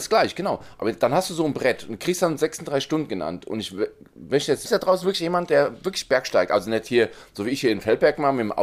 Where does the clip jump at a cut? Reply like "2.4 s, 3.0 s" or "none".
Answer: 4.7 s